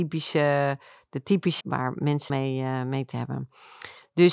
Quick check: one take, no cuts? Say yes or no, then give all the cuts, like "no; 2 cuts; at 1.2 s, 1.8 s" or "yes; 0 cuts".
no; 3 cuts; at 1.6 s, 2.3 s, 3.1 s